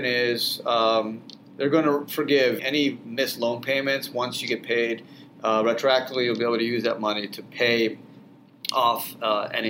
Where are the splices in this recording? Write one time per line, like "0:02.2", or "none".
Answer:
0:02.6

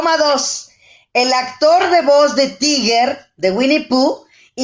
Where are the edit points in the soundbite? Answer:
none

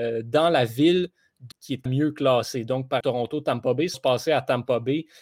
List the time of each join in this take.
0:01.5
0:01.9
0:03.0
0:03.9

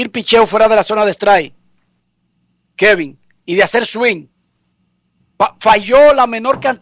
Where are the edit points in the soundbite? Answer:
none

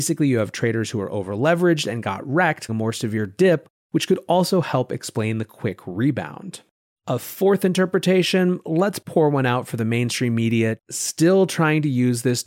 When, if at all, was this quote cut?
0:02.7

